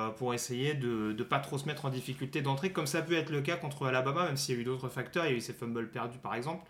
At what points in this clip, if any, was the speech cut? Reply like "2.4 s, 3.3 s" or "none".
none